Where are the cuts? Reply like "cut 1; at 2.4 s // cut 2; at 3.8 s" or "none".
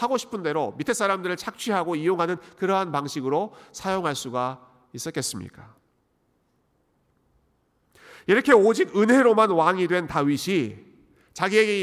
none